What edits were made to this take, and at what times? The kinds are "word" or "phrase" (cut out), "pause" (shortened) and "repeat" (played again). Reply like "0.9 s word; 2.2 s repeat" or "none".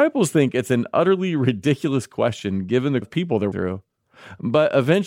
3.0 s word; 3.5 s word